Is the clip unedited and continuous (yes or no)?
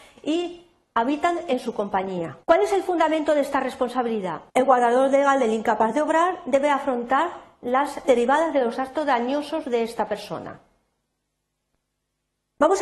no